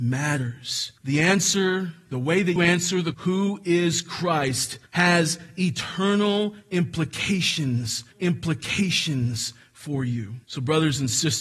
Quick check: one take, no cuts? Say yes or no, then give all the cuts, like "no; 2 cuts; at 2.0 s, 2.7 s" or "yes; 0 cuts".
no; 6 cuts; at 1.0 s, 2.6 s, 3.1 s, 4.9 s, 8.1 s, 10.4 s